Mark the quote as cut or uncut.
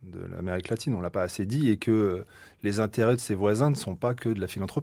uncut